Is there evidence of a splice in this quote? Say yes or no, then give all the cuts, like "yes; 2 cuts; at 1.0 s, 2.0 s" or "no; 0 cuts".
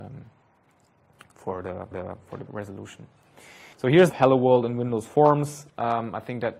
yes; 5 cuts; at 1.9 s, 2.5 s, 3.7 s, 4.1 s, 5.7 s